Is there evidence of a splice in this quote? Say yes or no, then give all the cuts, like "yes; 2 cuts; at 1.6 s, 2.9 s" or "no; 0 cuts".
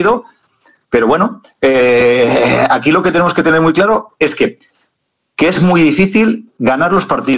no; 0 cuts